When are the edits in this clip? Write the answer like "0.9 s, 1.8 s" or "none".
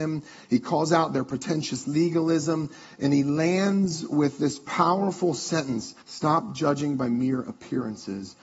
6.0 s

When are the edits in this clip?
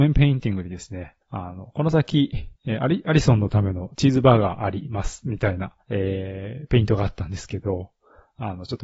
1.2 s, 2.5 s, 5.8 s

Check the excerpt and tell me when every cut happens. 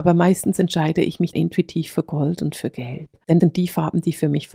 1.3 s, 3.4 s

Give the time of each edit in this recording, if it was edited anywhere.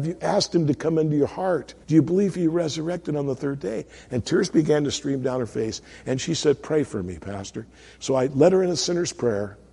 1.8 s

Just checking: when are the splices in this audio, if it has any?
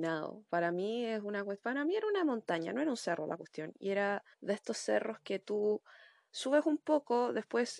4.3 s

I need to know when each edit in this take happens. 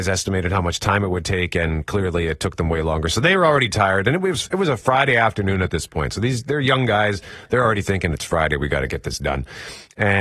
none

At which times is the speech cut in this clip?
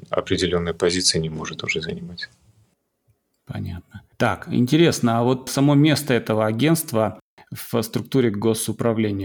4.1 s

